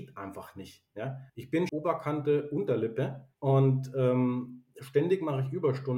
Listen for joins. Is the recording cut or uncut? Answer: cut